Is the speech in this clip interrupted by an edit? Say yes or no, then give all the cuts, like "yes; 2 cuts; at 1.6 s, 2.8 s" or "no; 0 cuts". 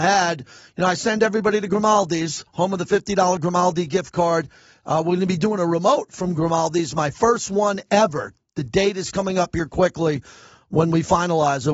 no; 0 cuts